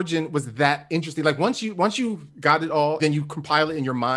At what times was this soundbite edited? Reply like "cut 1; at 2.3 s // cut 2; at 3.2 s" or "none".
cut 1; at 3.0 s